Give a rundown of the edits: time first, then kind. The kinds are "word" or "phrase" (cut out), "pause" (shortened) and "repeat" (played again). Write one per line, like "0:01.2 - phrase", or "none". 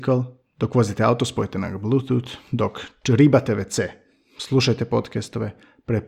none